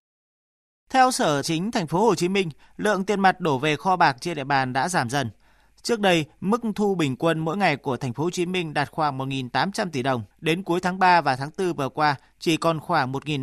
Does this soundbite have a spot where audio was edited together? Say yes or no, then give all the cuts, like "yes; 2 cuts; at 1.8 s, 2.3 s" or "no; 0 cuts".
yes; 2 cuts; at 1.4 s, 10.3 s